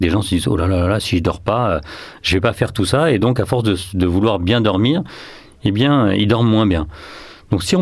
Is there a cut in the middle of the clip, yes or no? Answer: no